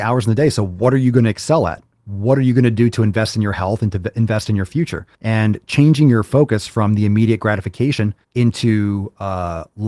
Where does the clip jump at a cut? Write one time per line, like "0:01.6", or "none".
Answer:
0:05.1
0:08.2